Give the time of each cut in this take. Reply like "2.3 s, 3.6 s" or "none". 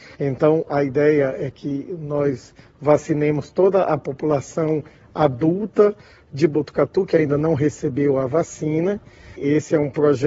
none